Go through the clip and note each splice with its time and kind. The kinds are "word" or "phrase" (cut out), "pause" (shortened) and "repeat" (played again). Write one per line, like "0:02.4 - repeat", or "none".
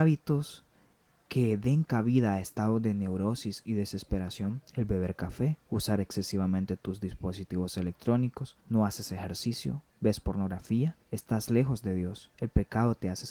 0:04.7 - pause
0:05.6 - pause
0:08.6 - pause
0:09.9 - pause
0:11.0 - pause
0:12.3 - pause